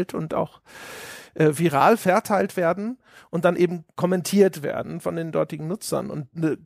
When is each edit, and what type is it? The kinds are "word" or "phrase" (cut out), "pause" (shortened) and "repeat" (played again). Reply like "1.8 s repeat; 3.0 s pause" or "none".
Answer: none